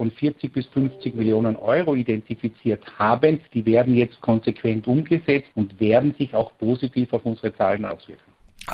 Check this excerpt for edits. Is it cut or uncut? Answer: cut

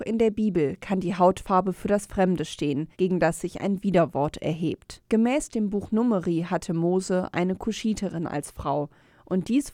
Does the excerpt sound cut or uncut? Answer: cut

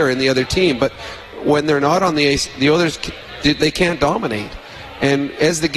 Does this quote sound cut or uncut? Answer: uncut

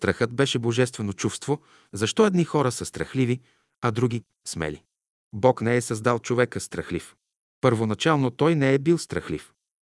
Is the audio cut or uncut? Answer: uncut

